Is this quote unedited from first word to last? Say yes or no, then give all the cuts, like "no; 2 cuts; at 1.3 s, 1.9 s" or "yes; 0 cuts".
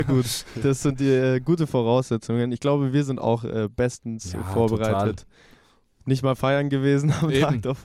yes; 0 cuts